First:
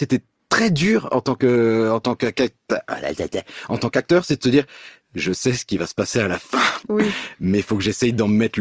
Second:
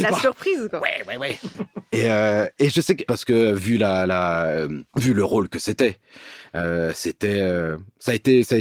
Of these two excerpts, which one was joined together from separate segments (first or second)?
second